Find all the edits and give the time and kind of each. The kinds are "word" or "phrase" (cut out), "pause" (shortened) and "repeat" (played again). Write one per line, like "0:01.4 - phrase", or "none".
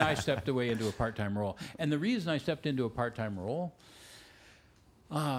none